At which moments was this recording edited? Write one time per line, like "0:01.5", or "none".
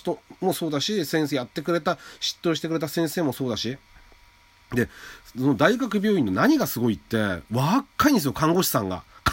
none